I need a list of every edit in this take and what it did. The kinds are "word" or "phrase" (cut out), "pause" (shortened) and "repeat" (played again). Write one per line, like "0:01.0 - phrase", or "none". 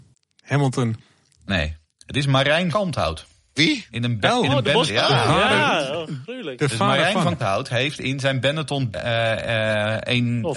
0:02.7 - word
0:04.9 - word
0:07.4 - word
0:08.9 - word